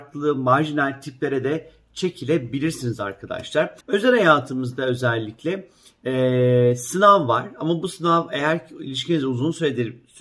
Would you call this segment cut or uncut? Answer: cut